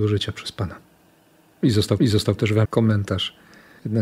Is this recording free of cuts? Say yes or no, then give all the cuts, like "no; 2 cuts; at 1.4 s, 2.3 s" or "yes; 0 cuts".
no; 2 cuts; at 2.0 s, 2.6 s